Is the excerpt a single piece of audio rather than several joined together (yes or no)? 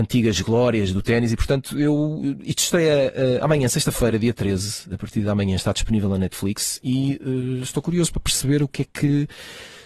yes